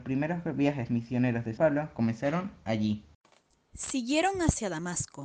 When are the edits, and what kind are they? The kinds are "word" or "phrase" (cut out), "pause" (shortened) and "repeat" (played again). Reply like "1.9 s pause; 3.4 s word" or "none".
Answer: 1.6 s word